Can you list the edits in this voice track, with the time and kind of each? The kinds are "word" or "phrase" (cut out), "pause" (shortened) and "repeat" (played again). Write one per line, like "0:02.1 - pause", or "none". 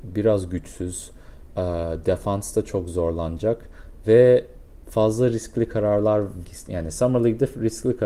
0:06.4 - word